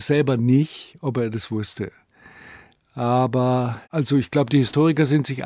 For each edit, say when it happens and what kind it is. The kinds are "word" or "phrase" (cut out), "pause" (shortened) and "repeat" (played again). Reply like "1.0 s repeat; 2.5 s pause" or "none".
3.8 s pause